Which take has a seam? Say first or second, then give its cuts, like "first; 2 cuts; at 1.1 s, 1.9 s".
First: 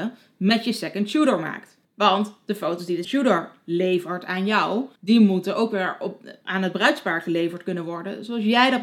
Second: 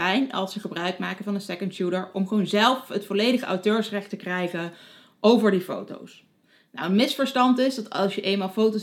first; 3 cuts; at 1.8 s, 3.0 s, 5.0 s